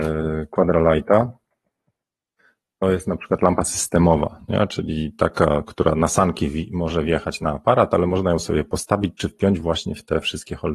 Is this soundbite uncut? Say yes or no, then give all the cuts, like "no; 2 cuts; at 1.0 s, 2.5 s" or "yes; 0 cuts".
yes; 0 cuts